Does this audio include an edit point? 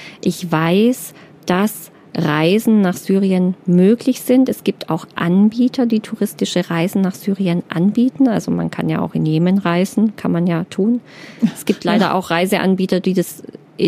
no; 0 cuts

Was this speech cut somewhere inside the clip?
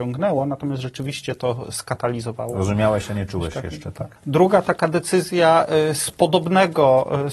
no; 0 cuts

